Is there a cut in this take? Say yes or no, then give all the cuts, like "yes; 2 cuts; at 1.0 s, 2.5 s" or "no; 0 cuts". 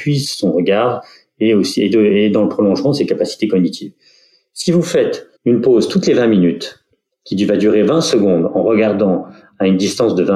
yes; 1 cut; at 5.4 s